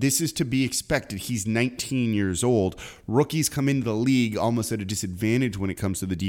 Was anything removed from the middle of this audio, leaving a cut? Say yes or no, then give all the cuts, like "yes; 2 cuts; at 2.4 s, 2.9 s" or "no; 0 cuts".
no; 0 cuts